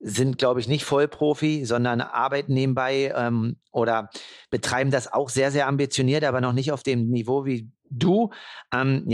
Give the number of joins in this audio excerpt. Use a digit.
1